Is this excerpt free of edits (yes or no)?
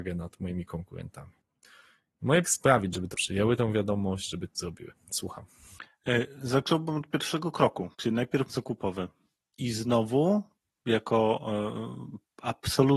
no